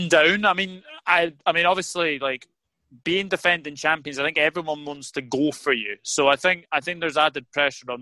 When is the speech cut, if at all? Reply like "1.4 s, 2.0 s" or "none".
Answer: none